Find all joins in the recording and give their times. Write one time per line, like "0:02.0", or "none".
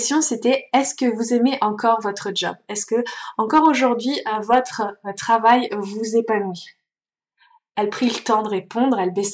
none